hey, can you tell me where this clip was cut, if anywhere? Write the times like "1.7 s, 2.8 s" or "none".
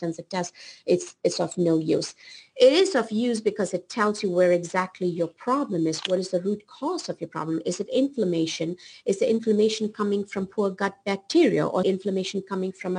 11.8 s